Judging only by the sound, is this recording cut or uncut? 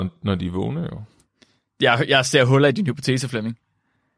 uncut